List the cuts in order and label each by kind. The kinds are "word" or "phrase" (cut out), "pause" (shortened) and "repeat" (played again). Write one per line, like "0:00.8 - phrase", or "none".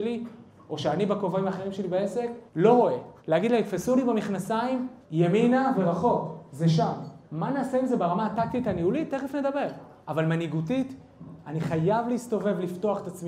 0:02.5 - pause
0:03.2 - pause
0:05.0 - pause
0:07.2 - pause
0:10.0 - pause